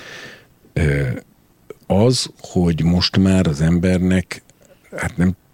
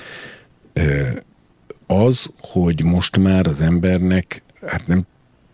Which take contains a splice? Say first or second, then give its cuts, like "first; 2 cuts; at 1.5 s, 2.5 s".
second; 1 cut; at 4.6 s